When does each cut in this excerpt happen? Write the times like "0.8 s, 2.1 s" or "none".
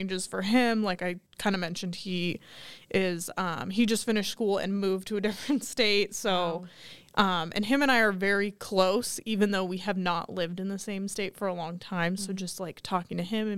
1.3 s